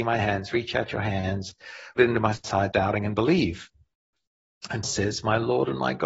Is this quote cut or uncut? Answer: cut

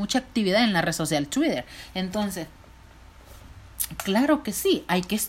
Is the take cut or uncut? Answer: uncut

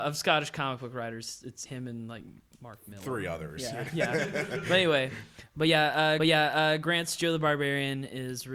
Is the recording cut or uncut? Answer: cut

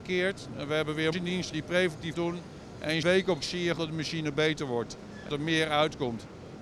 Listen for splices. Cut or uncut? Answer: cut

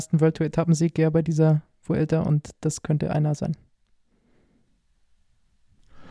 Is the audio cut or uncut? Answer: uncut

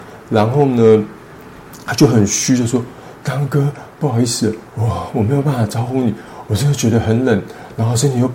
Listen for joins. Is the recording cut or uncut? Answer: cut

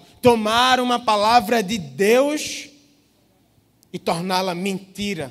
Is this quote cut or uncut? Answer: uncut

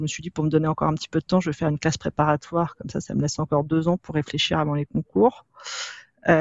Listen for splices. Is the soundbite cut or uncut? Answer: uncut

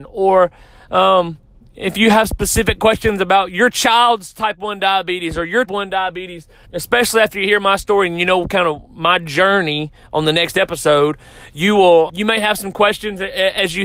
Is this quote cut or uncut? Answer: cut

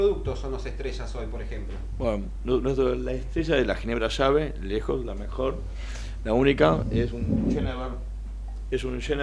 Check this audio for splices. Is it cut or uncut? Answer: uncut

